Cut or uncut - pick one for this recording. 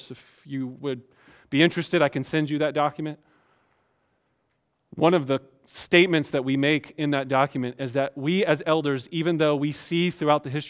uncut